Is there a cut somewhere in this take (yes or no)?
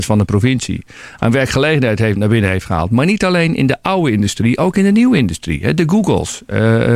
no